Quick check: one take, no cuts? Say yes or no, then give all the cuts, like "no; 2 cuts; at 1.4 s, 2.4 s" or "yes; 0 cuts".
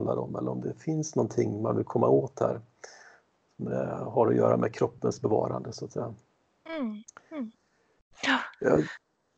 yes; 0 cuts